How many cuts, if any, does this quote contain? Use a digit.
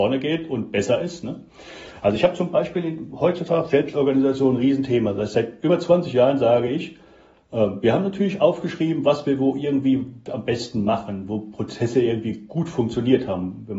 0